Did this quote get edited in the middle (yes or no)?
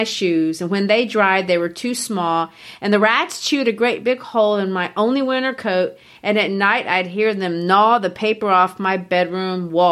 no